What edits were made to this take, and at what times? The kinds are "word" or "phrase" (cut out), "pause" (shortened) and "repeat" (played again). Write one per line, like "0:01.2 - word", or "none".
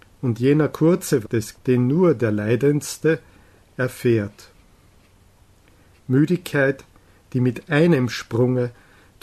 0:01.2 - word
0:01.5 - word